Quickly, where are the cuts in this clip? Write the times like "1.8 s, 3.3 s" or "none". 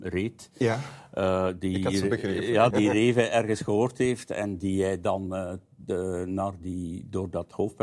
2.7 s